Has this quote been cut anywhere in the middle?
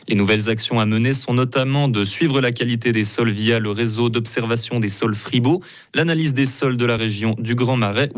no; 0 cuts

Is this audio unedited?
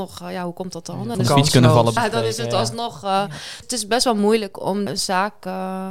no; 4 cuts; at 1.1 s, 2.0 s, 3.6 s, 4.9 s

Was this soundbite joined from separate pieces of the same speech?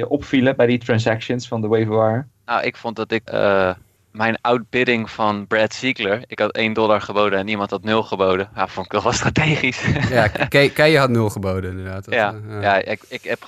yes; 3 cuts; at 2.3 s, 3.3 s, 4.0 s

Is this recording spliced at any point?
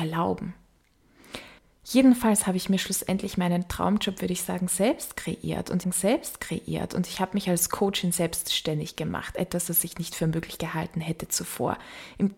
yes; 2 cuts; at 1.6 s, 5.8 s

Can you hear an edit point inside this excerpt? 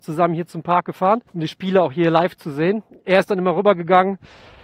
yes; 1 cut; at 1.3 s

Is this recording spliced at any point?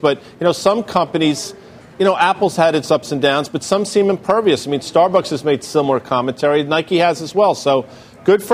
no; 0 cuts

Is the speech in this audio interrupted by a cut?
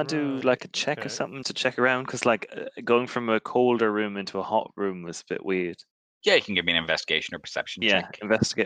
yes; 1 cut; at 1.4 s

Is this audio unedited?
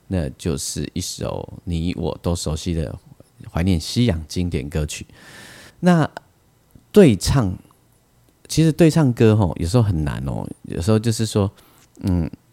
no; 1 cut; at 5.7 s

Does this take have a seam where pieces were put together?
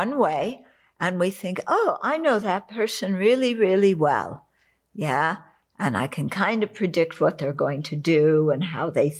no; 0 cuts

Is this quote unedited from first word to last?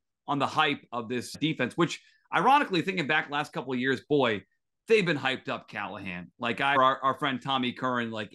no; 2 cuts; at 1.3 s, 6.8 s

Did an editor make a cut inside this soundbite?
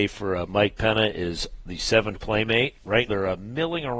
yes; 2 cuts; at 2.1 s, 3.1 s

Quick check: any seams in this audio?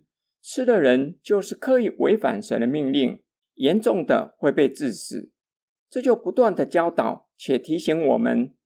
no; 0 cuts

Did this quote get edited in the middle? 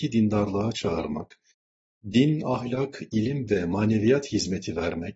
no; 0 cuts

